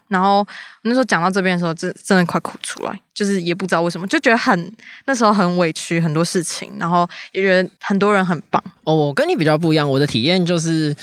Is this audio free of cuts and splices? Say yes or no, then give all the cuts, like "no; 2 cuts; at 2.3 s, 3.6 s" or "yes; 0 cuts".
no; 1 cut; at 7.8 s